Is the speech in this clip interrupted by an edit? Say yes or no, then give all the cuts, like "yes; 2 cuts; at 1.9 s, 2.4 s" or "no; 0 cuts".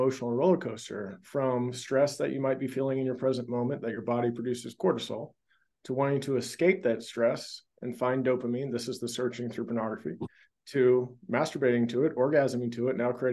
no; 0 cuts